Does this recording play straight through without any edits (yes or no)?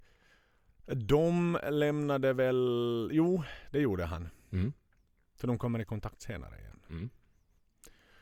yes